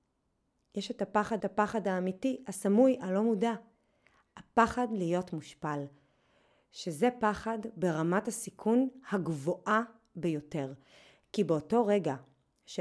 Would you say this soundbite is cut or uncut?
cut